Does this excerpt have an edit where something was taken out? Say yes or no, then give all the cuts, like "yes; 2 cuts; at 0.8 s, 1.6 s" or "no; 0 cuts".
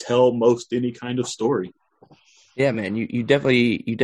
no; 0 cuts